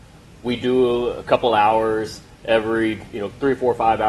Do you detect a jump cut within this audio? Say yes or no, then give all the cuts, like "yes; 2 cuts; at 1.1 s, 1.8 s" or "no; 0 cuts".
no; 0 cuts